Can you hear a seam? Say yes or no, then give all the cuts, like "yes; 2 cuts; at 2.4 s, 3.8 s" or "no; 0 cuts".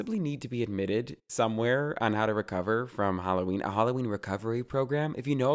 no; 0 cuts